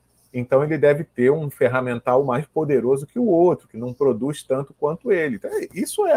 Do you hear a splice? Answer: no; 0 cuts

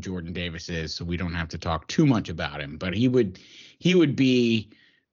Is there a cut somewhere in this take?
no; 0 cuts

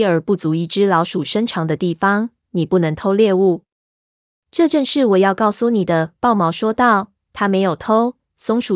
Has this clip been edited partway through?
no; 0 cuts

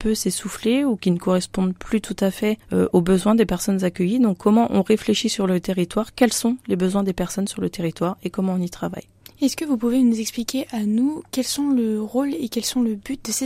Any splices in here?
no; 0 cuts

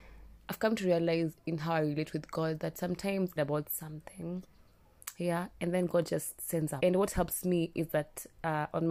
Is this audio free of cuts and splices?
no; 2 cuts; at 3.4 s, 6.8 s

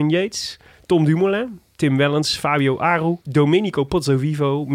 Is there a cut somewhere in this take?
yes; 1 cut; at 3.2 s

